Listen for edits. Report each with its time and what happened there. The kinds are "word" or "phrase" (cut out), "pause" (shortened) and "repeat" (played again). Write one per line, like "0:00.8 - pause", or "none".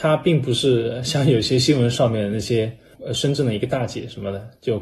none